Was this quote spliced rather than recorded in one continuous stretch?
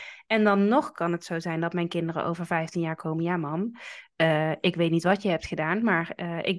no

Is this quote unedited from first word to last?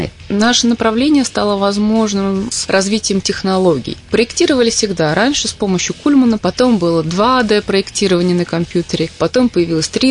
yes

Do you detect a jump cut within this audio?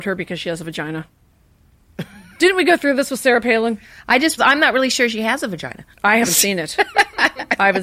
yes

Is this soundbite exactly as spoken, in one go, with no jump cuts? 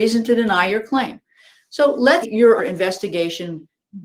no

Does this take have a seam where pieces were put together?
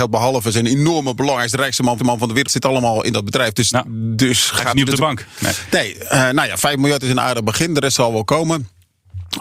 yes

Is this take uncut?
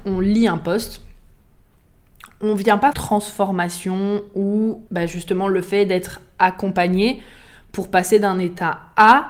no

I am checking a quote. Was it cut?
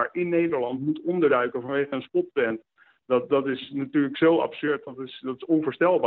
no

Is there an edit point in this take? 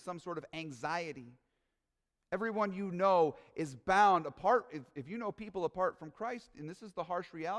no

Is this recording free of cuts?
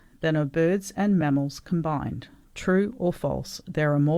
yes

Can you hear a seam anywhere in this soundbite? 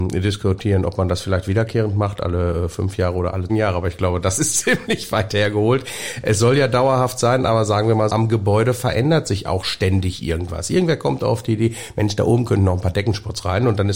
yes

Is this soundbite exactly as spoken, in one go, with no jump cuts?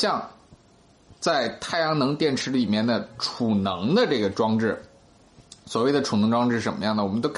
no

